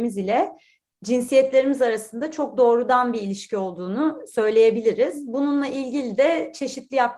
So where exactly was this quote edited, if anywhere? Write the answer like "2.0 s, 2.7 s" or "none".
none